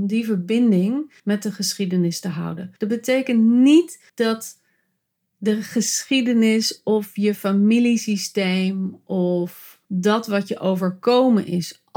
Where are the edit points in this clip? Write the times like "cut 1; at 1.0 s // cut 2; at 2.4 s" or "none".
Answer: cut 1; at 1.2 s // cut 2; at 2.8 s // cut 3; at 4.1 s // cut 4; at 9.8 s